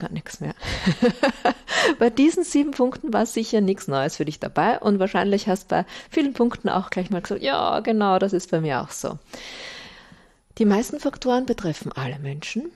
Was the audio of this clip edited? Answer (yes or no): no